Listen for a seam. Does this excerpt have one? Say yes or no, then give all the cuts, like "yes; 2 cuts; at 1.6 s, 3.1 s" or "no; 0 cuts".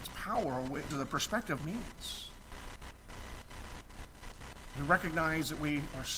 yes; 2 cuts; at 0.9 s, 1.6 s